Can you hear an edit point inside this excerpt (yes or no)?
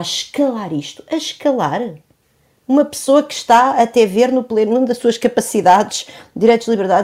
no